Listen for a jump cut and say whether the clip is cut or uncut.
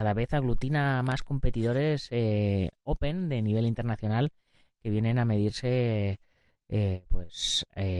uncut